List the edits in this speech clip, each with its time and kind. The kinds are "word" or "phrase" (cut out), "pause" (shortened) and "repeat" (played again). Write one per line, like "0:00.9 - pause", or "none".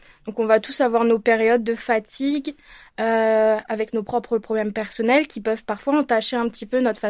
none